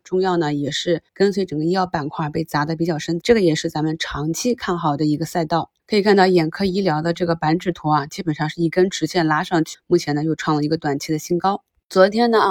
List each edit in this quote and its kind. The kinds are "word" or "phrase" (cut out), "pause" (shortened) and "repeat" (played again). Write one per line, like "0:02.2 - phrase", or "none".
0:01.1 - pause
0:03.2 - phrase
0:05.8 - pause
0:09.7 - word